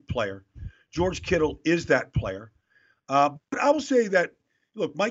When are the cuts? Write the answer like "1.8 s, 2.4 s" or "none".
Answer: none